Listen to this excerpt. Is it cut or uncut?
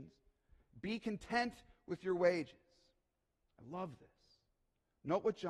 uncut